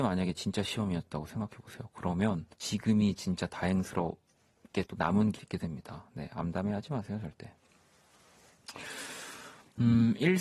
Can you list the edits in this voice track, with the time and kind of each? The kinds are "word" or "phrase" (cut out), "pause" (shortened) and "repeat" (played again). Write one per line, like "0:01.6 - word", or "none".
0:02.5 - pause
0:04.8 - word
0:05.3 - phrase